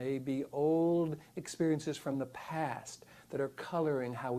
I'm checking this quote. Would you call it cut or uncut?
uncut